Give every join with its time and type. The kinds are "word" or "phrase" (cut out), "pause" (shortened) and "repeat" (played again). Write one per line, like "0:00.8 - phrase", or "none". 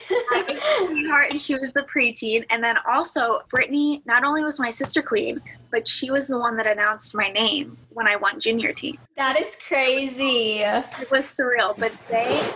0:03.5 - pause
0:07.8 - pause
0:09.1 - pause